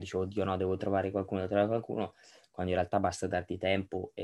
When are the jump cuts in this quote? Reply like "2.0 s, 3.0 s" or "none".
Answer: none